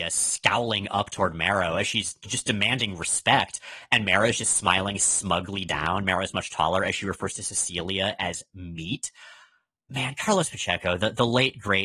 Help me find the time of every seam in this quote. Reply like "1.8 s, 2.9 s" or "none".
none